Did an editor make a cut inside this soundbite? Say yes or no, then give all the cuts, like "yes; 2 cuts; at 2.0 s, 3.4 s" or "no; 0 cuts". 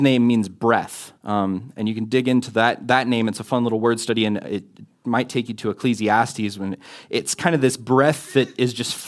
yes; 1 cut; at 1.2 s